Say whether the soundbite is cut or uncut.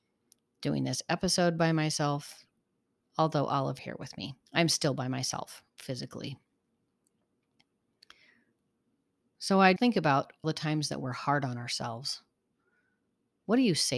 cut